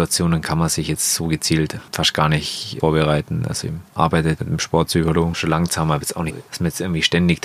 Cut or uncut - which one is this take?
cut